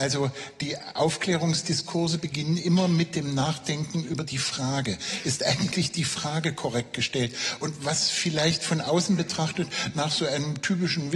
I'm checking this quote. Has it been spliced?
no; 0 cuts

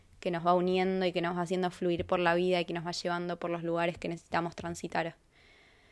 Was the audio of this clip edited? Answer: no; 0 cuts

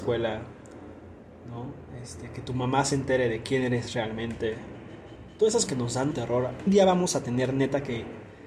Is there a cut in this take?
yes; 3 cuts; at 5.7 s, 6.1 s, 6.7 s

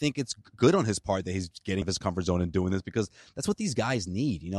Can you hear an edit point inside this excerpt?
yes; 1 cut; at 1.8 s

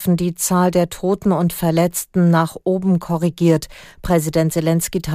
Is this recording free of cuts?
yes; 0 cuts

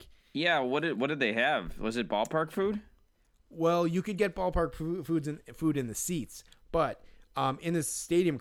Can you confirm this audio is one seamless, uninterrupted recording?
yes; 0 cuts

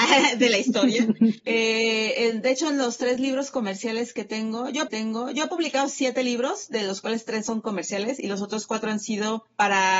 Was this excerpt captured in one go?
no; 1 cut; at 4.9 s

